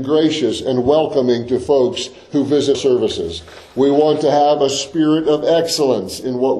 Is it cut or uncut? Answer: cut